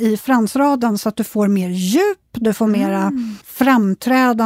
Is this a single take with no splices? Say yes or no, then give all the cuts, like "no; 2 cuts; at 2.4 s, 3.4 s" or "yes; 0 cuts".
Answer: no; 1 cut; at 3.4 s